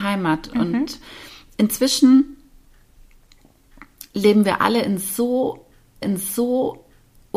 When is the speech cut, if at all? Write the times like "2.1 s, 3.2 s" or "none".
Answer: 6.0 s

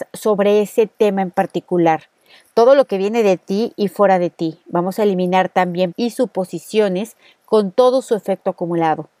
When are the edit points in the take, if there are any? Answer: 5.9 s

